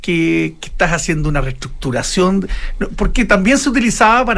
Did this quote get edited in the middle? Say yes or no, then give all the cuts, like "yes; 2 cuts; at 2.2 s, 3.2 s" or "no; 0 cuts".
no; 0 cuts